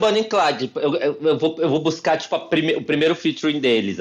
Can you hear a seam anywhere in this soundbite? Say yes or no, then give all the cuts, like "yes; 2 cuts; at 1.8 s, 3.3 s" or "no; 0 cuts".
no; 0 cuts